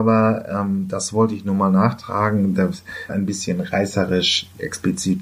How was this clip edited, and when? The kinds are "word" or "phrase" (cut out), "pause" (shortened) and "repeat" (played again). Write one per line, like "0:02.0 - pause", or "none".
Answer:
0:03.1 - phrase